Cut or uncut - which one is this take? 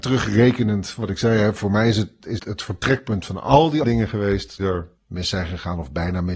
cut